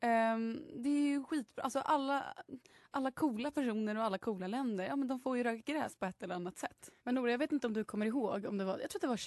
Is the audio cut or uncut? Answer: cut